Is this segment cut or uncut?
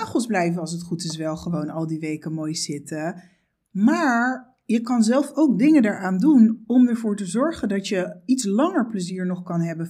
uncut